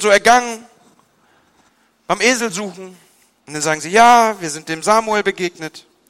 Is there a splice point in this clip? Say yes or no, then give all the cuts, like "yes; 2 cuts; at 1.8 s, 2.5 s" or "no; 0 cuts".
no; 0 cuts